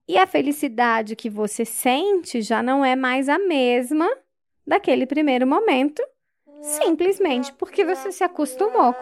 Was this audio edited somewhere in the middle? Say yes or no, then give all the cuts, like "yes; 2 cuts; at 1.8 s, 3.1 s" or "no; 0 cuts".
no; 0 cuts